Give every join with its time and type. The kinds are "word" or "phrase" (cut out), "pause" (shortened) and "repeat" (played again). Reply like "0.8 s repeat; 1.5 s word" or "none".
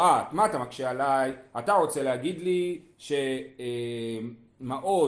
none